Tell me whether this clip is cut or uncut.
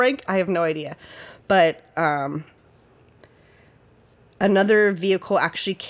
uncut